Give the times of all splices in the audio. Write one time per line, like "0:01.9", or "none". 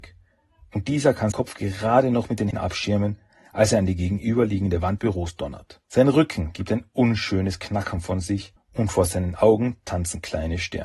0:01.3
0:02.5
0:05.0
0:05.8
0:08.6